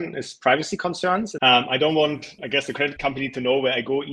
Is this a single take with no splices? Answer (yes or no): no